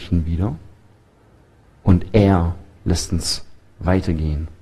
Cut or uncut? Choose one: uncut